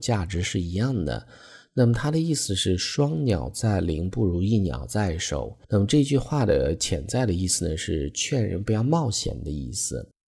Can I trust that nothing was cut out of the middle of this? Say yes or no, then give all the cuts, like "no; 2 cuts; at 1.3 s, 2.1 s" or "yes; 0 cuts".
no; 1 cut; at 5.6 s